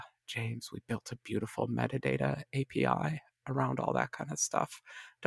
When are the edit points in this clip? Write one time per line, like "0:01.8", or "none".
none